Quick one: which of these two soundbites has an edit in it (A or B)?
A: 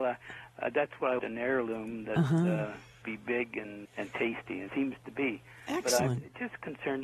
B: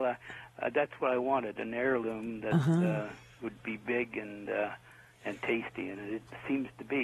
A